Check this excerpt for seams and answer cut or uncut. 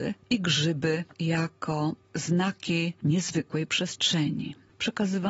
uncut